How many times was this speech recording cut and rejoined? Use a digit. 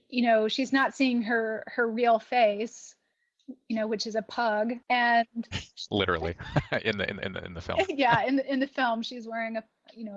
1